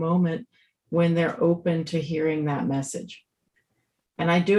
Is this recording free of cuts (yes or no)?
yes